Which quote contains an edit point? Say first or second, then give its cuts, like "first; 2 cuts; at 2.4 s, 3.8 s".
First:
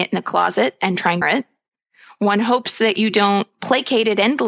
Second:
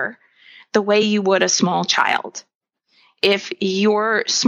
first; 1 cut; at 1.2 s